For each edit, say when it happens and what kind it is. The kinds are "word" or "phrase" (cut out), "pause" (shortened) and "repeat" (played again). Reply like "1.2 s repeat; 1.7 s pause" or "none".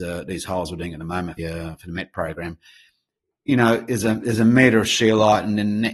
1.4 s phrase